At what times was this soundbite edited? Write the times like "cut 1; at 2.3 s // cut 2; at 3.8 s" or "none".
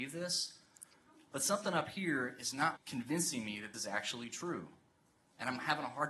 cut 1; at 2.8 s // cut 2; at 3.7 s